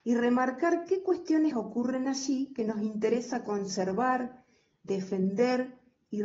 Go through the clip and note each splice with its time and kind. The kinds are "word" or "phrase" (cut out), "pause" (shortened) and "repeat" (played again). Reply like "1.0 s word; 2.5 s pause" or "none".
1.5 s word